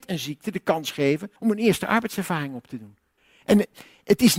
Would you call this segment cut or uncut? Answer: cut